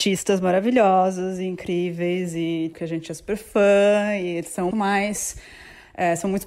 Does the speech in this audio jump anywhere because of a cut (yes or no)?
yes